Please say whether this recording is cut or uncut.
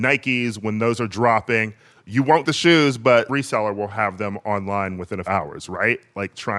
cut